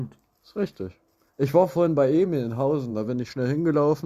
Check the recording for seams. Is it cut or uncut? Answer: uncut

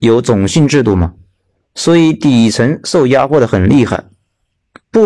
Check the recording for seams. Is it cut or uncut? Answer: uncut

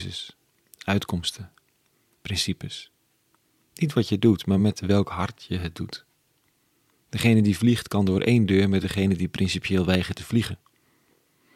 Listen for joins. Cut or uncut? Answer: uncut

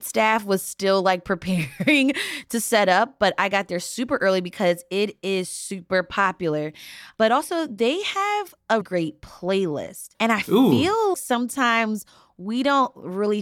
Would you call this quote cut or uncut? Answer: cut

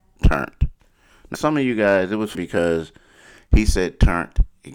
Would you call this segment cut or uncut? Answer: cut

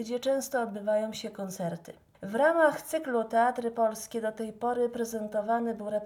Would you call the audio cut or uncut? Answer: uncut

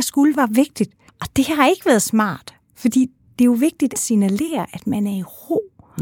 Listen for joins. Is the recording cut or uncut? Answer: cut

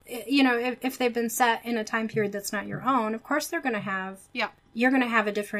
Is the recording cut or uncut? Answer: uncut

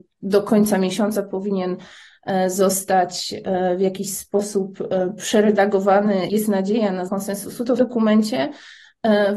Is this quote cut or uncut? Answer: cut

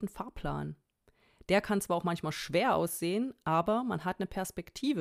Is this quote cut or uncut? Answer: uncut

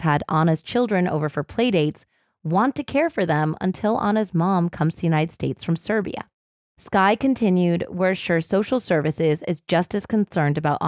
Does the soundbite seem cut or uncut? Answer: uncut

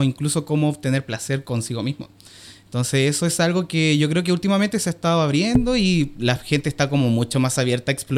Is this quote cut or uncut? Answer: uncut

